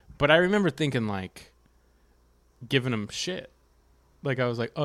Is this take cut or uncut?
uncut